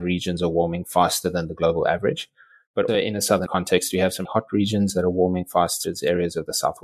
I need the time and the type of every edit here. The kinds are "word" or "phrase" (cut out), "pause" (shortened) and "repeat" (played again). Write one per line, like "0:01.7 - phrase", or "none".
0:02.9 - word
0:03.5 - word
0:04.2 - word
0:05.8 - word